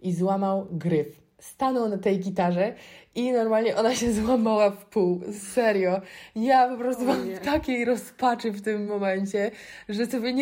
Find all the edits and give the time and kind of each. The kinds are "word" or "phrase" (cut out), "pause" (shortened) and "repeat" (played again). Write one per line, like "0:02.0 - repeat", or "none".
none